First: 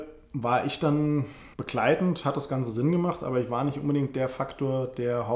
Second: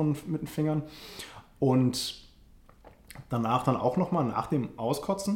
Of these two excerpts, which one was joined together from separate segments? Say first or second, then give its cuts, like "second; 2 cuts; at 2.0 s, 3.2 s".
first; 1 cut; at 1.5 s